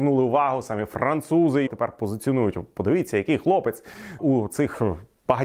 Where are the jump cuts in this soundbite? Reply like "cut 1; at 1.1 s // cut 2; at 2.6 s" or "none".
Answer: cut 1; at 1.7 s // cut 2; at 4.2 s